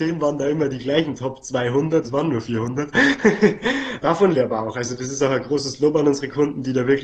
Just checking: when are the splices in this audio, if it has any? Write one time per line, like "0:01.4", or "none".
0:02.0
0:04.3

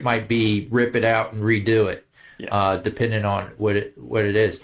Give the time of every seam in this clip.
none

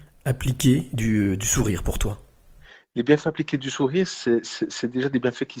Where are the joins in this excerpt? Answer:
none

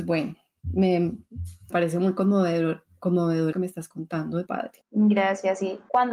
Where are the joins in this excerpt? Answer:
0:01.7
0:03.5
0:04.5

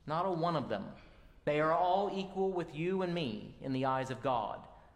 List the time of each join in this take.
none

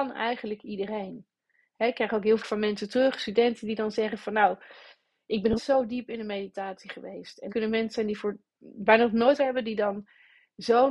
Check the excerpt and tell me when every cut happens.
0:02.4
0:05.6
0:07.5
0:09.4

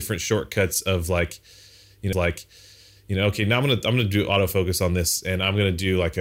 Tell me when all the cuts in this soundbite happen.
0:02.1

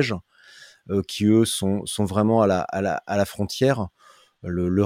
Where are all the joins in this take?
none

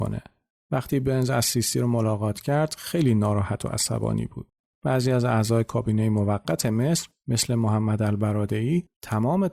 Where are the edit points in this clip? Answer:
none

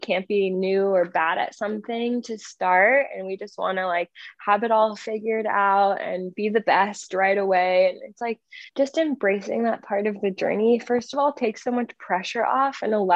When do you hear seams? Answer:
0:08.7

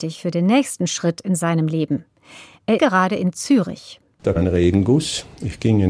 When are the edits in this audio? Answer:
0:02.8
0:04.4

